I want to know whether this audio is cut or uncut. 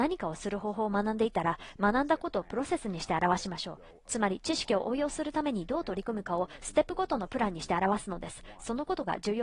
uncut